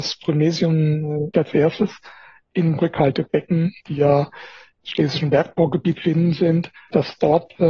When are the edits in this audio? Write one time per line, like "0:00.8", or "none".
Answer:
0:01.3
0:02.8
0:04.8
0:06.0